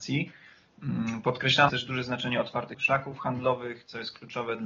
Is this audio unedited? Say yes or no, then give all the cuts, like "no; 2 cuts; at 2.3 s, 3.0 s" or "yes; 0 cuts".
no; 2 cuts; at 1.7 s, 2.7 s